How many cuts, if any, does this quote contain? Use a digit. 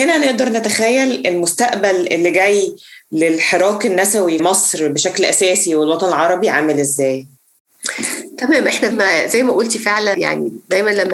3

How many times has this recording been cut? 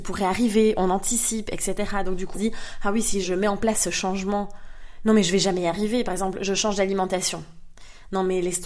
2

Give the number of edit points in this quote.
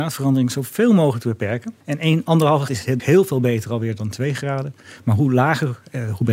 3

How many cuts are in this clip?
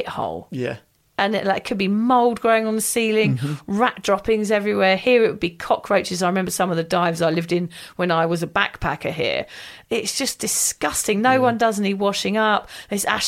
0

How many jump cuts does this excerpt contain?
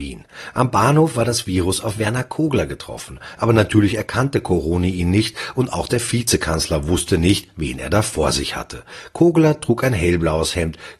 0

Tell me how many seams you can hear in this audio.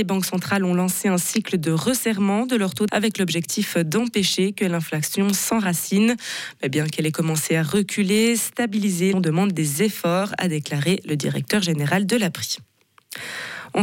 2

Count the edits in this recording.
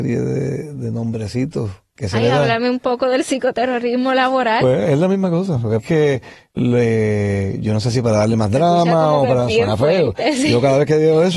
2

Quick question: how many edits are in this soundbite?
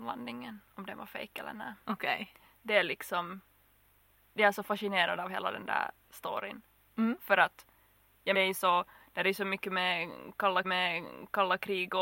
2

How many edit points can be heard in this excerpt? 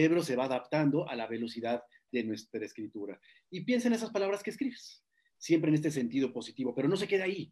0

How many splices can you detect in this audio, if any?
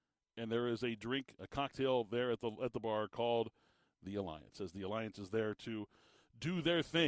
0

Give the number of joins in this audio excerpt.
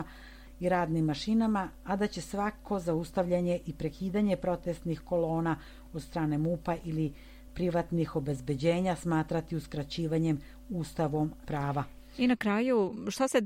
1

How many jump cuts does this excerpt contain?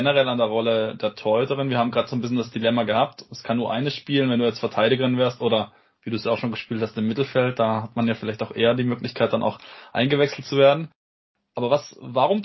0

